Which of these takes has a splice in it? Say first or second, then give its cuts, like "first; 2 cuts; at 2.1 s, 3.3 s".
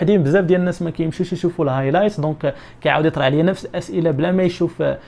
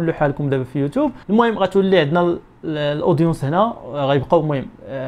second; 1 cut; at 1.2 s